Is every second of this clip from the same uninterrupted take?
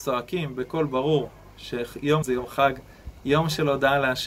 no; 1 cut; at 2.2 s

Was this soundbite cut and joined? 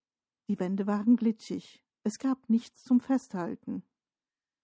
no; 0 cuts

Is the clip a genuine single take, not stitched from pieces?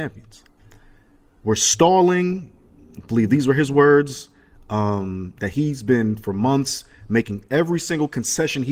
yes; 0 cuts

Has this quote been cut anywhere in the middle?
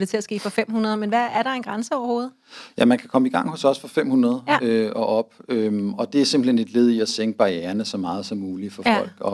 no; 0 cuts

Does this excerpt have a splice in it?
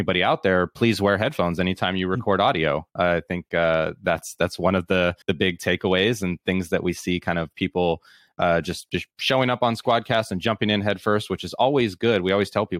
yes; 1 cut; at 5.2 s

